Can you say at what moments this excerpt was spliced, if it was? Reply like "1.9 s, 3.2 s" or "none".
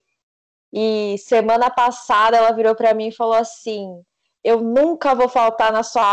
none